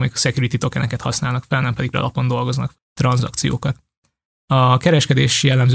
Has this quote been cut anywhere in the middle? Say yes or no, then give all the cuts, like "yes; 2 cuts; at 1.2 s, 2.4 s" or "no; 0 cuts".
yes; 2 cuts; at 1.9 s, 2.7 s